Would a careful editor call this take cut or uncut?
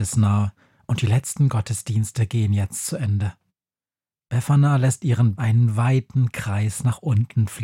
cut